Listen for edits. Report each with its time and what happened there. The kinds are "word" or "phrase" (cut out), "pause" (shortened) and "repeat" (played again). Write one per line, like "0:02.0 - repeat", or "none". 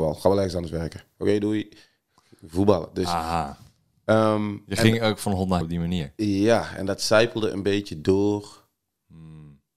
0:05.6 - word